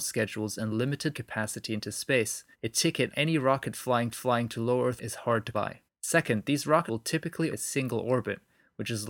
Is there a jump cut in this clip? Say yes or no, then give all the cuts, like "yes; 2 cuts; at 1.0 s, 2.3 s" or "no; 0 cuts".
yes; 9 cuts; at 1.1 s, 2.5 s, 3.1 s, 4.1 s, 5.0 s, 5.5 s, 5.9 s, 6.9 s, 7.5 s